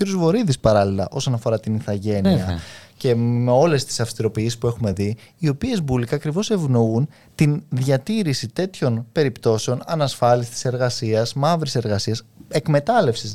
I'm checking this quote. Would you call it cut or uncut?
uncut